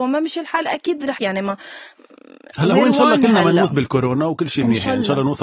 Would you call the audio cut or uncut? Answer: cut